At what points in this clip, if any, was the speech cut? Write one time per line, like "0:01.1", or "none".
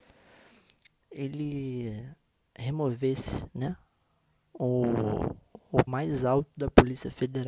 0:02.3
0:05.9